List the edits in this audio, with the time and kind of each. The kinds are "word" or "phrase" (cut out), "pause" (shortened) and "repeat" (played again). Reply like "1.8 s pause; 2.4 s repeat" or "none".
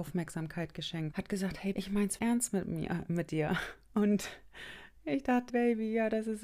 1.1 s word; 1.7 s word; 2.2 s word; 5.0 s pause; 5.5 s word